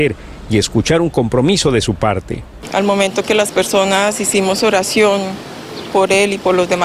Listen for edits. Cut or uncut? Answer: uncut